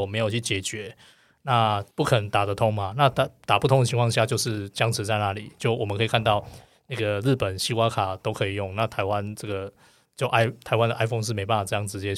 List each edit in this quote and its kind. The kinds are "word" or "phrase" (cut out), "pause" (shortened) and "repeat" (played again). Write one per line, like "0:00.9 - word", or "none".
0:01.9 - pause